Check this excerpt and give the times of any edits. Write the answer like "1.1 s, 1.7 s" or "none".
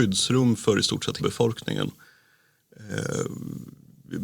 1.2 s